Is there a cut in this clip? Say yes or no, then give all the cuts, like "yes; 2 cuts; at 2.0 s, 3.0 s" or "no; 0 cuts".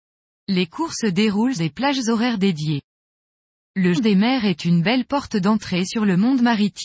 yes; 2 cuts; at 1.6 s, 4.0 s